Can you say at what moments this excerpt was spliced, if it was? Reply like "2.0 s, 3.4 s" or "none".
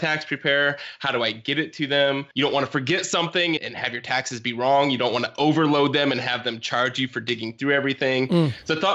2.3 s, 3.6 s